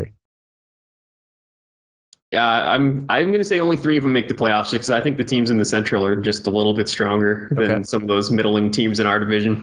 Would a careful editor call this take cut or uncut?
uncut